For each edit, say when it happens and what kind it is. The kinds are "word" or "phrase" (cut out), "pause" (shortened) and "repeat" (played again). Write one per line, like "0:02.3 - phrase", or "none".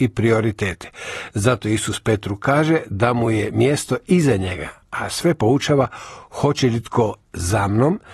none